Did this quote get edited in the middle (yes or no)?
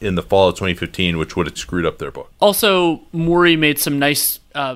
yes